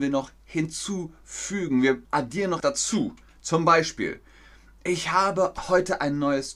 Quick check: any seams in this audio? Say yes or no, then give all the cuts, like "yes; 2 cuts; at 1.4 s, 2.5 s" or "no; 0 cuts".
yes; 2 cuts; at 2.0 s, 2.6 s